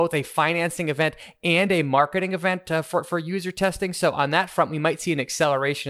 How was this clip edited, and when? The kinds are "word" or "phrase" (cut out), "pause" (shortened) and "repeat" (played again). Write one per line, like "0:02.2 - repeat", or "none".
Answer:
none

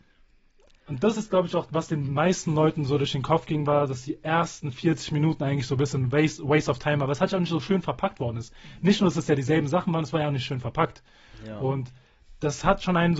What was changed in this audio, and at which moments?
none

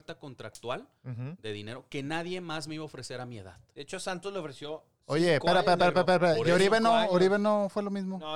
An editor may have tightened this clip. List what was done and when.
none

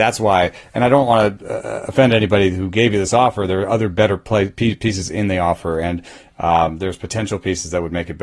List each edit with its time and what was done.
none

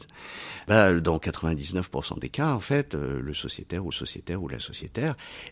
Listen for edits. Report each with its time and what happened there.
0:03.9 - repeat

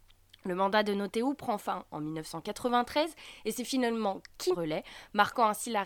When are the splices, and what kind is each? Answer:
0:04.5 - phrase

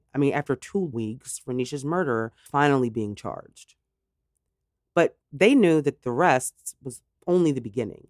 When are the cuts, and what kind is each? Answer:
0:00.9 - word
0:02.5 - word
0:05.2 - pause

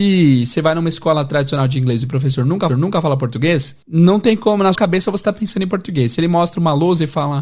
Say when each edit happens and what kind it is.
0:02.7 - repeat
0:03.8 - pause
0:04.7 - word

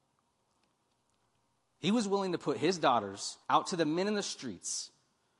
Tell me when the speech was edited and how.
0:03.4 - pause

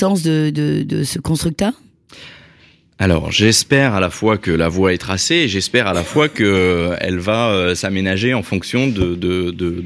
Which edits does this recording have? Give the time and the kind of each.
none

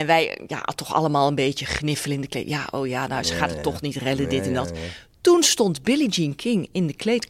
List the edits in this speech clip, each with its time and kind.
none

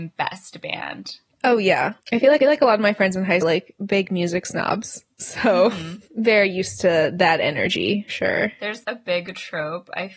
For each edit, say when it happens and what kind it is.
0:02.4 - repeat
0:03.4 - phrase
0:08.1 - word
0:08.8 - word

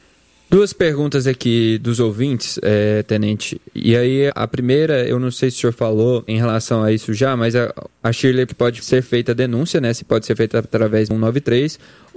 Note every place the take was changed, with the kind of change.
0:04.3 - word
0:06.3 - word
0:08.5 - phrase
0:08.8 - word
0:11.1 - word

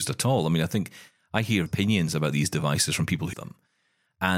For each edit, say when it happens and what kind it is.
0:01.7 - word
0:03.3 - word

